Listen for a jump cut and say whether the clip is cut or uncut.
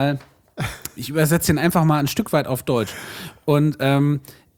cut